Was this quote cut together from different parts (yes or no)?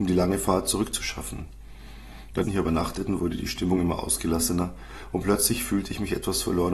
yes